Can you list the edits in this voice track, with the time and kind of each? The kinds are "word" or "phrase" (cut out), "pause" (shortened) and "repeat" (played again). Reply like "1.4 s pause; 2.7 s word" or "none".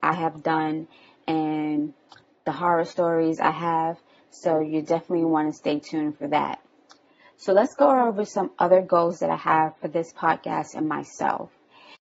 none